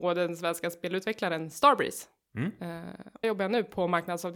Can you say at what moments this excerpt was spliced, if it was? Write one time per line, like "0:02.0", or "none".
0:03.2